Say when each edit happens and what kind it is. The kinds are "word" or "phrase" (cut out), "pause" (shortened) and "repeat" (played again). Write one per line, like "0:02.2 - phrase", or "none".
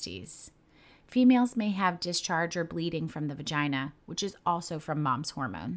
none